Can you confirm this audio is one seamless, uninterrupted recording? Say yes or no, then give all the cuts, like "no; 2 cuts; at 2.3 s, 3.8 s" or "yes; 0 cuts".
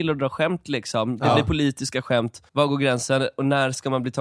no; 1 cut; at 2.5 s